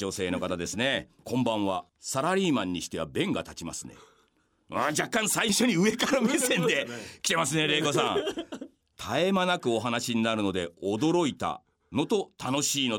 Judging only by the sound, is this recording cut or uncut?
cut